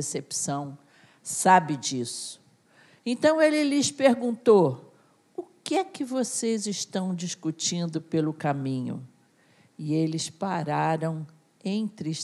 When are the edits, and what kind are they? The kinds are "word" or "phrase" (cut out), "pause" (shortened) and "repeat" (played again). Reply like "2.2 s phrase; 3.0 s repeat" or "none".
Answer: none